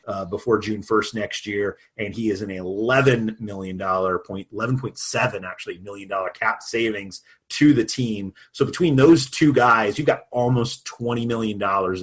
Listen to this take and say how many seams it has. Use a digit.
0